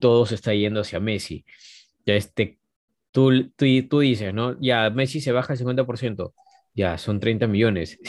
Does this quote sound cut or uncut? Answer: uncut